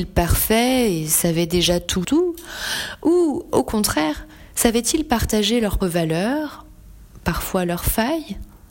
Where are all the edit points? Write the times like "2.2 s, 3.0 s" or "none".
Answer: 2.0 s, 5.8 s